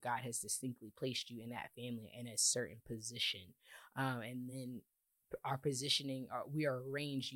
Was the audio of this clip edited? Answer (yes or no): no